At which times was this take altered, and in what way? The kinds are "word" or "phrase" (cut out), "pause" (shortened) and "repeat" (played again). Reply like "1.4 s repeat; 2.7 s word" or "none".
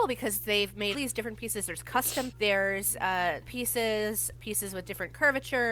0.9 s word; 2.3 s word; 3.4 s word; 4.4 s word